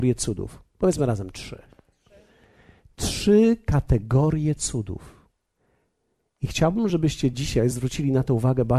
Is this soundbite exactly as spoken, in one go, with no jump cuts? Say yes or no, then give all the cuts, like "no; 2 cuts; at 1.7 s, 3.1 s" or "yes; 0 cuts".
yes; 0 cuts